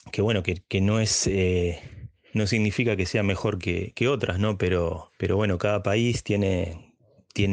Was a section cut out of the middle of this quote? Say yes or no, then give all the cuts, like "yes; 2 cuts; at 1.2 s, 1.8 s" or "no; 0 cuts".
yes; 1 cut; at 5.1 s